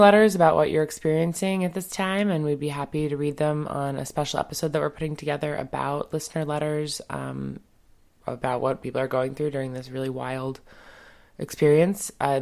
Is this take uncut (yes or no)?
yes